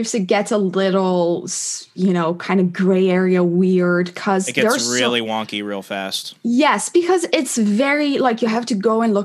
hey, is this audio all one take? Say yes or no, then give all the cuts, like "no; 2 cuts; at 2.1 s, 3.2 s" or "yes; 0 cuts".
yes; 0 cuts